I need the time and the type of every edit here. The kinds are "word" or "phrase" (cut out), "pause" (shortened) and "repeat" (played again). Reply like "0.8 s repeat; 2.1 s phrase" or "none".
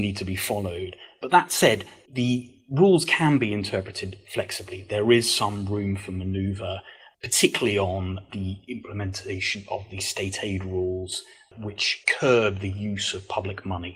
none